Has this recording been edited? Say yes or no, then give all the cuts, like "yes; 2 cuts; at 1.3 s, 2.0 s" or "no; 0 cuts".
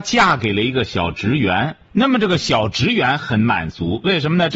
yes; 1 cut; at 1.9 s